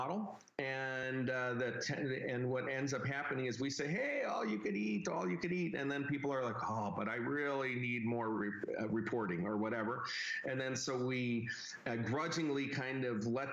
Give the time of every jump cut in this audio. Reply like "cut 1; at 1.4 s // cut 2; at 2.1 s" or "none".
none